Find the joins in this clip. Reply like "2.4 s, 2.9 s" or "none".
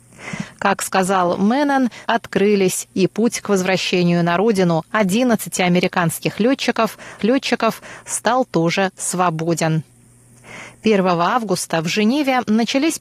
2.1 s, 7.2 s